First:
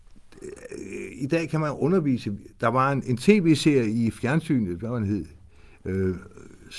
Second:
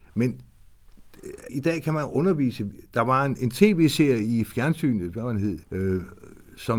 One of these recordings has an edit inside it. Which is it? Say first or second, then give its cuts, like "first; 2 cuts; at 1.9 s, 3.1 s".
second; 2 cuts; at 1.5 s, 5.6 s